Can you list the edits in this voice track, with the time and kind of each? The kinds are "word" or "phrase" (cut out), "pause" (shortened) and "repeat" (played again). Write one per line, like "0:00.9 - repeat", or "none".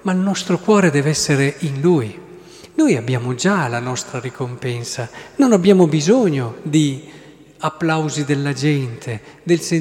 none

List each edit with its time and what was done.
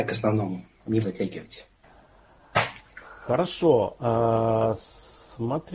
0:01.0 - word

